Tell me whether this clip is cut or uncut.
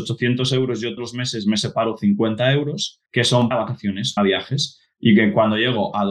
cut